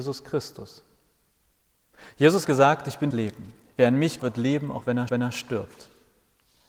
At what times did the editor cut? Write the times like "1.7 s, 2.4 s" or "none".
2.4 s, 3.1 s, 4.2 s, 5.1 s